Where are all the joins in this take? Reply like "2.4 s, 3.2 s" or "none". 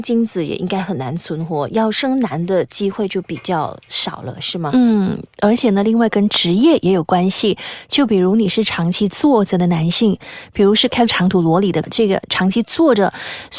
11.8 s